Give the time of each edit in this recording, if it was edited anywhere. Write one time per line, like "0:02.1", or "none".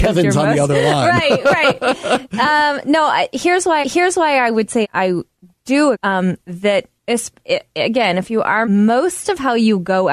0:03.8
0:04.8
0:05.9
0:07.0
0:08.6